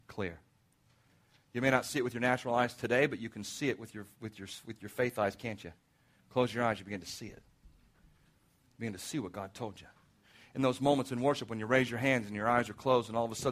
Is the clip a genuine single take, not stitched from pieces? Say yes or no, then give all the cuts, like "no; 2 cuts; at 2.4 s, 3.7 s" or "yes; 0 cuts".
yes; 0 cuts